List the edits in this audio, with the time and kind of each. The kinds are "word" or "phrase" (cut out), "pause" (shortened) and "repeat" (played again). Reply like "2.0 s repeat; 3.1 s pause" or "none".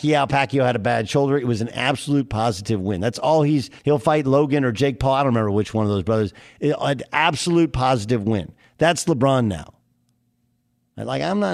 3.8 s pause